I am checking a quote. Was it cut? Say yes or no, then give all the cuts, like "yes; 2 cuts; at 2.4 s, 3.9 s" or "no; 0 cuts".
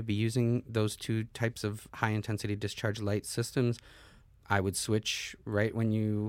yes; 2 cuts; at 1.9 s, 4.4 s